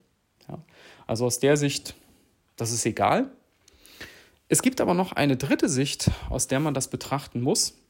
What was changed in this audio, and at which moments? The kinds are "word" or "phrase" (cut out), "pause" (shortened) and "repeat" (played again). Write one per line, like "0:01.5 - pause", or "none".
none